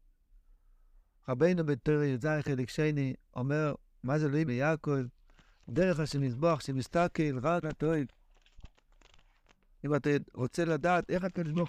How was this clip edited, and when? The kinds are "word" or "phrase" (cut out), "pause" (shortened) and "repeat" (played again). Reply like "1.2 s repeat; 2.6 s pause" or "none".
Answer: 4.5 s word; 7.6 s word